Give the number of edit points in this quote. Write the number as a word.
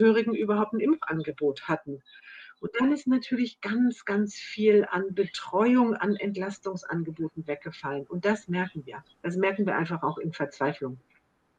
one